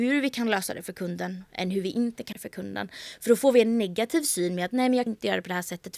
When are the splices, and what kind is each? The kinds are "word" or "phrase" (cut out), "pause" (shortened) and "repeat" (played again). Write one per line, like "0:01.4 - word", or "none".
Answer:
0:02.3 - word
0:05.1 - word